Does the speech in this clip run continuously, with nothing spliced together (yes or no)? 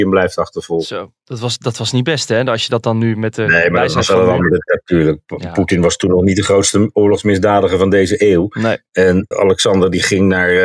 no